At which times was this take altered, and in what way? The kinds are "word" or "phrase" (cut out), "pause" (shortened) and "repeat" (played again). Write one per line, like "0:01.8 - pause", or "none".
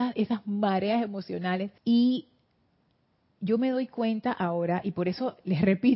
0:01.8 - pause